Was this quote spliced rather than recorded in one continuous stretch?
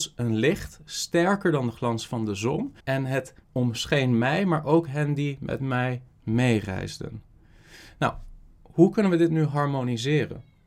yes; 2 cuts; at 2.8 s, 3.4 s

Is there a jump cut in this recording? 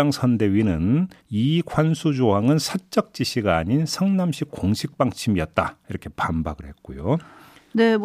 yes; 2 cuts; at 1.2 s, 2.6 s

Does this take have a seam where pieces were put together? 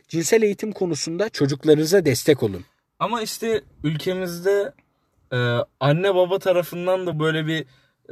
no; 0 cuts

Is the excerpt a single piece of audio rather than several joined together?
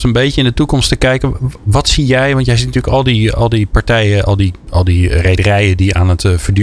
yes; 0 cuts

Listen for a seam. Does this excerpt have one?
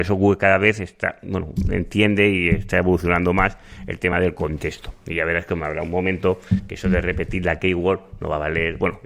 no; 0 cuts

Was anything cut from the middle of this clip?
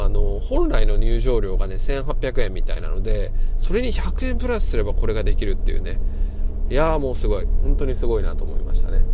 no; 0 cuts

